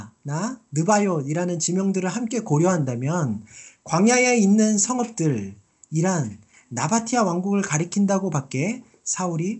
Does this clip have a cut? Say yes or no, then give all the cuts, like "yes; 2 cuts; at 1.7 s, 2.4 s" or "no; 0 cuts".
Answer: no; 0 cuts